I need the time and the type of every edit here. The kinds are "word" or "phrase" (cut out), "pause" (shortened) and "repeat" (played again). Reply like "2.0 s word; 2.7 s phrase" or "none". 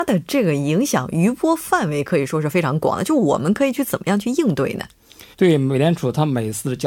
5.3 s pause